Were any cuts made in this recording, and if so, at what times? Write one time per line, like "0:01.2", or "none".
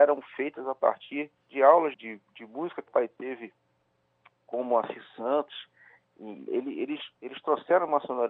0:01.4
0:01.9
0:02.9
0:06.5